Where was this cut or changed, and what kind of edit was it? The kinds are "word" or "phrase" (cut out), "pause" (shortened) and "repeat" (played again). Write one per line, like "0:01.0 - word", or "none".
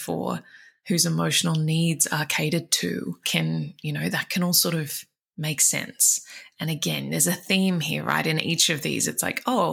0:03.2 - word